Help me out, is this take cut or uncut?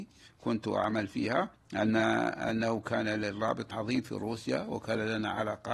cut